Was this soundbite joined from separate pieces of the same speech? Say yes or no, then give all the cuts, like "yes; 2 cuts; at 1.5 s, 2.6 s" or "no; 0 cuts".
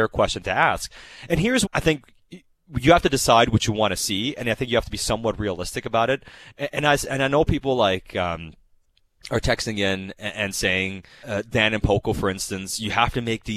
yes; 2 cuts; at 1.7 s, 11.2 s